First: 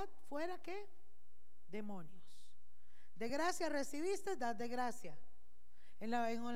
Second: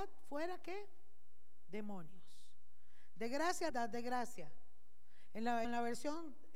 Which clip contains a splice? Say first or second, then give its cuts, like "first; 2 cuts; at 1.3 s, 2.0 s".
second; 2 cuts; at 3.7 s, 5.6 s